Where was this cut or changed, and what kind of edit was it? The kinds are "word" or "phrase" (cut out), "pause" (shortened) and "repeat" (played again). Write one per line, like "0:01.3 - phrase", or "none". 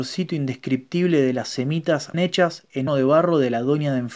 0:02.1 - word
0:02.9 - word

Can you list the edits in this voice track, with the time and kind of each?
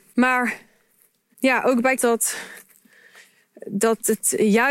0:02.0 - phrase

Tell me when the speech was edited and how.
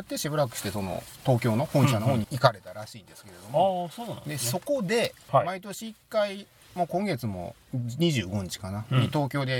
0:02.2 - phrase

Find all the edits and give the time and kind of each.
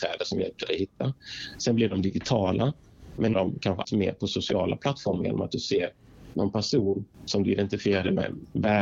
0:03.3 - phrase
0:03.8 - word
0:07.1 - pause

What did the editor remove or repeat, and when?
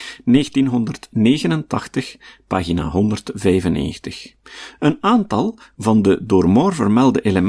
none

